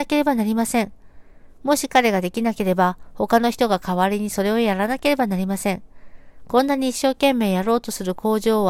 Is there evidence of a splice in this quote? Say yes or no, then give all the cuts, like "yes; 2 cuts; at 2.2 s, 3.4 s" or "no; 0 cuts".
no; 0 cuts